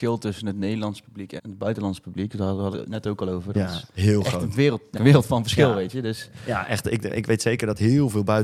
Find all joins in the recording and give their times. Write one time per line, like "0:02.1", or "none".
0:01.4
0:02.7
0:04.9